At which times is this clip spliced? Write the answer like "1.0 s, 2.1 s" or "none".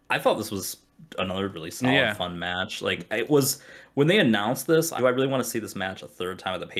1.5 s, 5.0 s